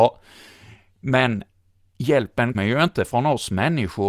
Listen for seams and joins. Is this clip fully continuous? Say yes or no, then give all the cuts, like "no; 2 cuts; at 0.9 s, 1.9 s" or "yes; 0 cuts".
no; 1 cut; at 2.5 s